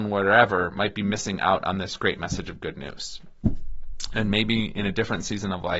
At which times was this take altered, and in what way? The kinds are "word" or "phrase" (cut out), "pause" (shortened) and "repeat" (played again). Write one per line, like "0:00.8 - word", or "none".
none